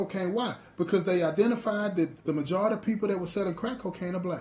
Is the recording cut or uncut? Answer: cut